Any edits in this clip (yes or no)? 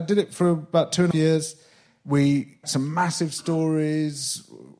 yes